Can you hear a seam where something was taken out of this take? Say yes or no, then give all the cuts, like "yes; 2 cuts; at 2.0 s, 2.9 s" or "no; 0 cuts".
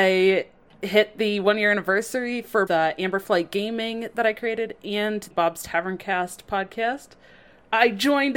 yes; 2 cuts; at 2.7 s, 5.3 s